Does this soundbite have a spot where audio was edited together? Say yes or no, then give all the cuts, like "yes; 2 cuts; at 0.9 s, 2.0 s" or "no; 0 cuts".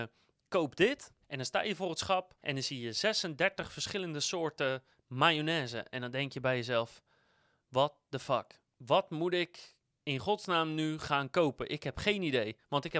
yes; 3 cuts; at 1.2 s, 2.4 s, 8.7 s